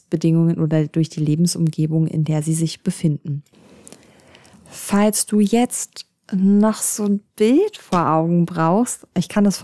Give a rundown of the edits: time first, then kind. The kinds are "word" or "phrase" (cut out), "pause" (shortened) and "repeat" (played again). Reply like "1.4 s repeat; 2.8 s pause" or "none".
none